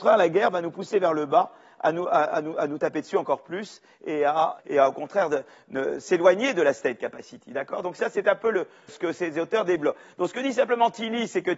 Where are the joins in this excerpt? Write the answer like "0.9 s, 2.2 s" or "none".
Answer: 4.6 s, 8.9 s